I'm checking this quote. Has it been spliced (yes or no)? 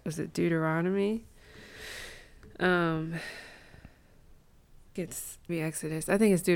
yes